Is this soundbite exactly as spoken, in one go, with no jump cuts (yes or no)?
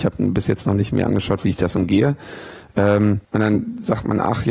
no